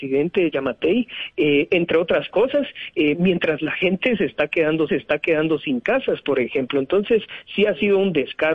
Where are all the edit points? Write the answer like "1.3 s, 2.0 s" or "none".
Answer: 4.9 s